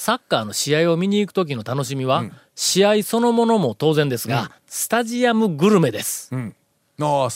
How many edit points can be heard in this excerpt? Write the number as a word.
one